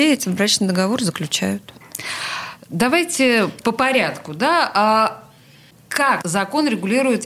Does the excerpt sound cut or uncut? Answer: cut